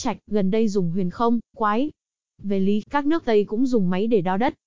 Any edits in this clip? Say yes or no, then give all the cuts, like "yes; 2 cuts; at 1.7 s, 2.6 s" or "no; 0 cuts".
yes; 3 cuts; at 1.5 s, 2.8 s, 3.3 s